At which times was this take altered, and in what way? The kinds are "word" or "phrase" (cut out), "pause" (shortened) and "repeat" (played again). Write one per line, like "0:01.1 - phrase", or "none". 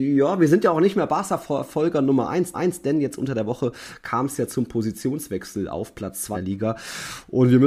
0:02.5 - repeat
0:06.3 - word